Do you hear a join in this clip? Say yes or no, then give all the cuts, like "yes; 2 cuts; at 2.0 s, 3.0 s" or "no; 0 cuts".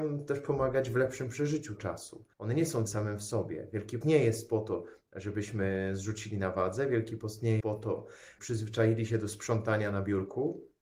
yes; 6 cuts; at 1.8 s, 2.3 s, 2.9 s, 4.0 s, 7.6 s, 8.4 s